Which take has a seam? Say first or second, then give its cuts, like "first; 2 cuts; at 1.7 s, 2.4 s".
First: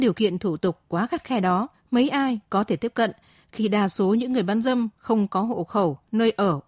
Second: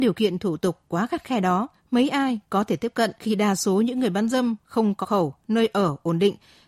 second; 2 cuts; at 3.2 s, 5.0 s